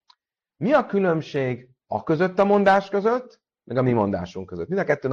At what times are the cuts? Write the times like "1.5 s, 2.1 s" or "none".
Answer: 1.8 s